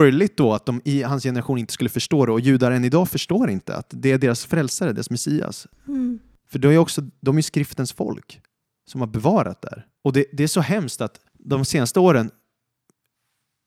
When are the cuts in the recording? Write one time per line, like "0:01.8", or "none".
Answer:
0:10.0
0:11.3